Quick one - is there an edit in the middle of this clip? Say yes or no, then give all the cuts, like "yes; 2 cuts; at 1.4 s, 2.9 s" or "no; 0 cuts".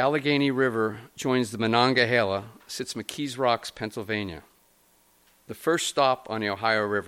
no; 0 cuts